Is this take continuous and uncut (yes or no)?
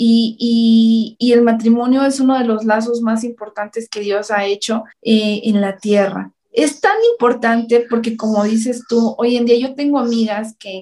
no